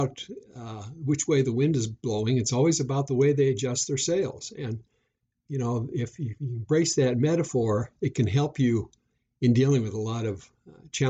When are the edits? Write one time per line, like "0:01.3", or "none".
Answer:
none

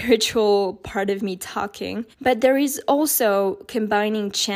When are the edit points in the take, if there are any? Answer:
0:02.1

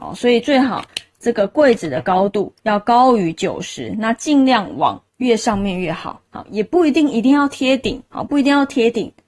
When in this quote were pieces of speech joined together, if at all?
0:02.6
0:05.1
0:08.1

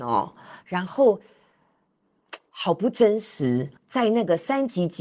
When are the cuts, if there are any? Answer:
0:03.8

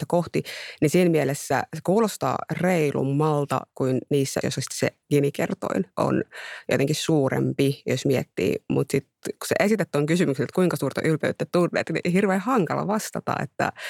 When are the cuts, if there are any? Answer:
0:04.4
0:05.0

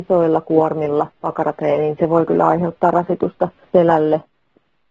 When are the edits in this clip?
0:01.1
0:03.6

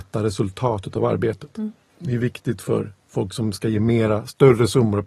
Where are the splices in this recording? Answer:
0:01.9

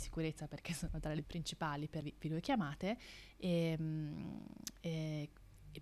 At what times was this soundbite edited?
0:01.2
0:02.0

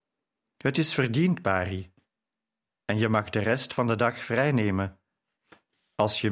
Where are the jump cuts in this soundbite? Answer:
none

